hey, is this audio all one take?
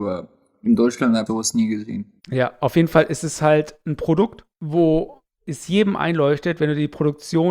no; 3 cuts; at 1.3 s, 2.2 s, 4.5 s

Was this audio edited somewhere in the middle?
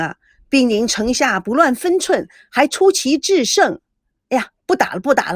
no; 0 cuts

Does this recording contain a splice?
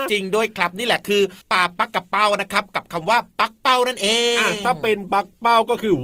yes; 1 cut; at 1.4 s

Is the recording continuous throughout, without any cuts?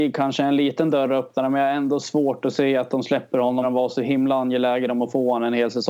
no; 1 cut; at 3.6 s

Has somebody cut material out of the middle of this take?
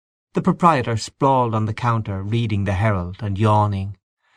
no; 0 cuts

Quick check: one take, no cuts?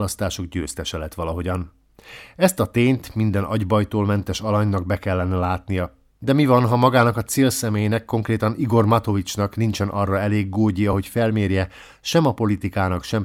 yes; 0 cuts

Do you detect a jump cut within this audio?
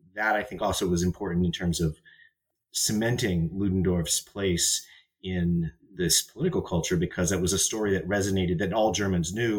no; 0 cuts

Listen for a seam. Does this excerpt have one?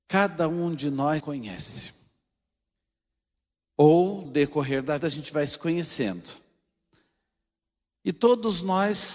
yes; 3 cuts; at 1.2 s, 4.2 s, 5.0 s

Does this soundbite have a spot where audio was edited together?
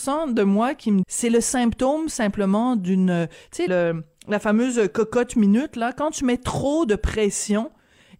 yes; 2 cuts; at 1.0 s, 3.7 s

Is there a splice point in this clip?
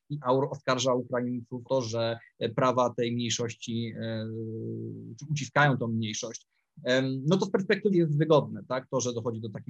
yes; 2 cuts; at 1.7 s, 7.9 s

